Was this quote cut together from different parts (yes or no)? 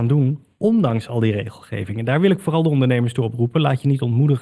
no